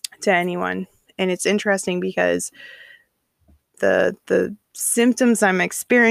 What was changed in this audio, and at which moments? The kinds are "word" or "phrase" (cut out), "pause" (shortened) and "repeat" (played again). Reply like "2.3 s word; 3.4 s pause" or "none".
none